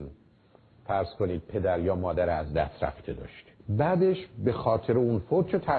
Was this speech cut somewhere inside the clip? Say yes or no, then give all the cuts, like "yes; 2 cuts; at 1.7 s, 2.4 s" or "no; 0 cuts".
yes; 1 cut; at 3.6 s